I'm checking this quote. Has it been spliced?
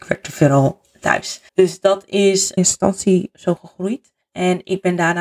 yes; 2 cuts; at 1.5 s, 2.6 s

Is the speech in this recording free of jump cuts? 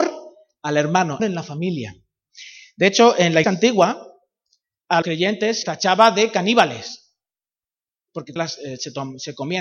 no; 5 cuts; at 1.2 s, 3.4 s, 5.0 s, 5.6 s, 8.4 s

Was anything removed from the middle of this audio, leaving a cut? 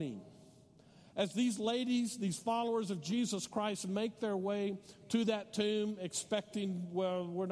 no; 0 cuts

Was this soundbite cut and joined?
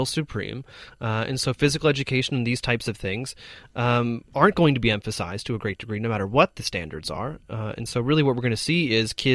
no; 0 cuts

